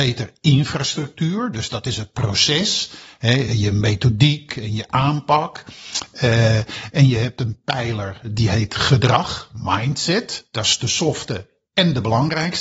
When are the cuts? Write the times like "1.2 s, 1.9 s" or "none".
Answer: none